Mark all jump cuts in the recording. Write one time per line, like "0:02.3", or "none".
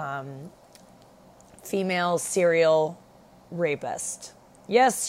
none